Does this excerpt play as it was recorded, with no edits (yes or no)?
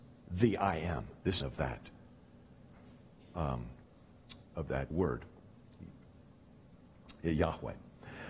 no